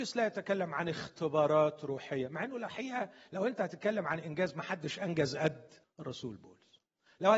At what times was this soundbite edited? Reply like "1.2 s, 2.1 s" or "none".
5.8 s